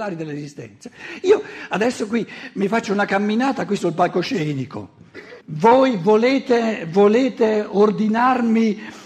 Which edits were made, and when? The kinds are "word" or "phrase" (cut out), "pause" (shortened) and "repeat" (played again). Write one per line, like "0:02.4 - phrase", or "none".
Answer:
0:05.4 - pause